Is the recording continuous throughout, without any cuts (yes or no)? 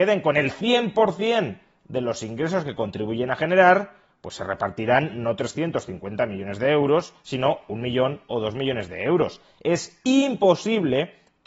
yes